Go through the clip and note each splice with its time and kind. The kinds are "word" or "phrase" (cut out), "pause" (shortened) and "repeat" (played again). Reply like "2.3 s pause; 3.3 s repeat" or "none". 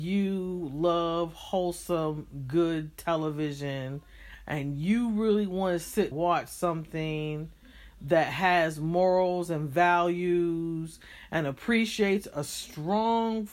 6.1 s phrase